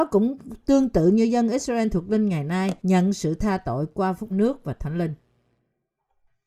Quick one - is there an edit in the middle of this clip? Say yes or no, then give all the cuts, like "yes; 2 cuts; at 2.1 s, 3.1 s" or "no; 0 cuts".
yes; 2 cuts; at 2.8 s, 4.3 s